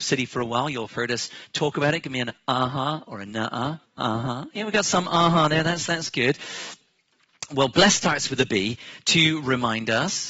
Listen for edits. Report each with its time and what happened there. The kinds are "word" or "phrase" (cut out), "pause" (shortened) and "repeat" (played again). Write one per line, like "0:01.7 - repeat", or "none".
0:03.8 - pause